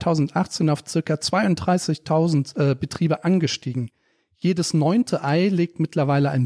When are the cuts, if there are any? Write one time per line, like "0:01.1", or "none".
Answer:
none